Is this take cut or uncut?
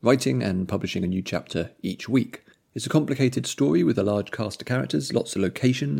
cut